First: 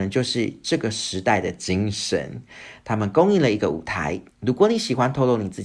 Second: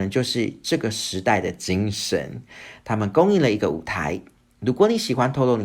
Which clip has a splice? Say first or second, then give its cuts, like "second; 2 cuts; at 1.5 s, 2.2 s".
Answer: first; 1 cut; at 4.3 s